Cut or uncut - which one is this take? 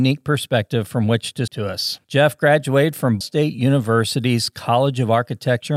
cut